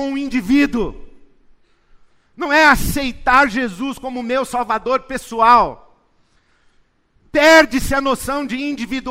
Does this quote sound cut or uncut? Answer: uncut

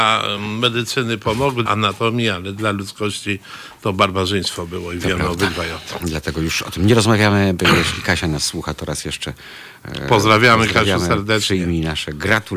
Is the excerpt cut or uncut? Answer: cut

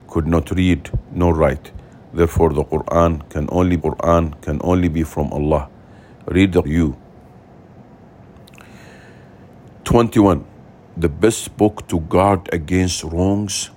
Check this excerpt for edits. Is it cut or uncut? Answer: cut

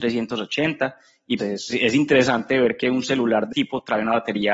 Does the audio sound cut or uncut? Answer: cut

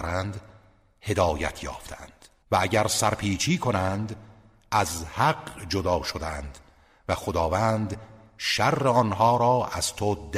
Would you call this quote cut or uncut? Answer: uncut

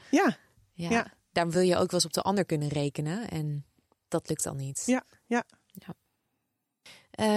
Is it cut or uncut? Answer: uncut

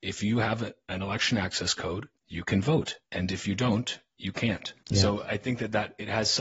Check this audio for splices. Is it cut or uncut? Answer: cut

